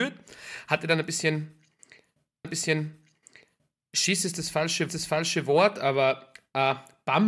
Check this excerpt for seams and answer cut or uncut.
cut